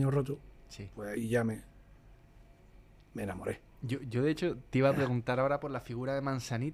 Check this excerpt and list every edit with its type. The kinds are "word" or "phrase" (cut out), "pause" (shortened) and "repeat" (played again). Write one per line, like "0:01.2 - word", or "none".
none